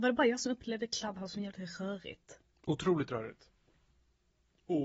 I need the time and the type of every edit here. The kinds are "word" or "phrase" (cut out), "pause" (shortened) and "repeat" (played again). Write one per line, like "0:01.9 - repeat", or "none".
none